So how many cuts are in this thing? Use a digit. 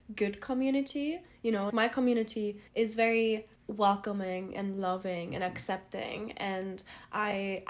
3